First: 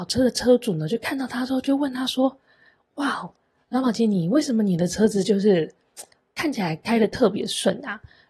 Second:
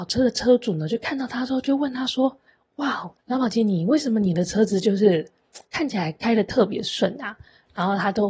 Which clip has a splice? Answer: second; 3 cuts; at 2.5 s, 3.2 s, 5.7 s

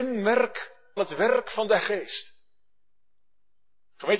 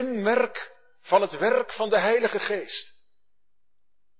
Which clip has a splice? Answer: first; 2 cuts; at 1.0 s, 1.8 s

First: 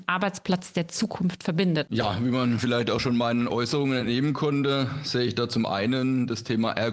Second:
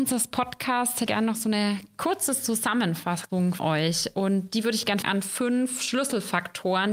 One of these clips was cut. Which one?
second; 3 cuts; at 1.1 s, 3.6 s, 5.0 s

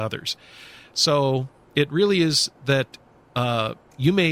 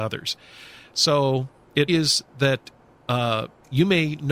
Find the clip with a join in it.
second; 1 cut; at 1.9 s

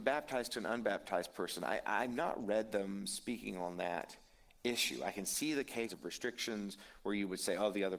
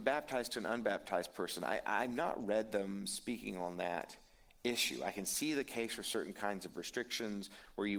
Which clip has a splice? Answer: first; 1 cut; at 5.9 s

